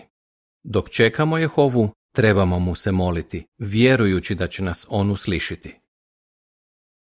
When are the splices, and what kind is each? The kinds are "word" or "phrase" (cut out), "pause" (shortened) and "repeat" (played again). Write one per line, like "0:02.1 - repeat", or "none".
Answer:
none